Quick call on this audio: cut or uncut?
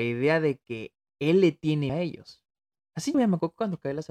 cut